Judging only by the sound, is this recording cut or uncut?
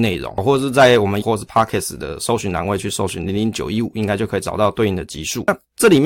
cut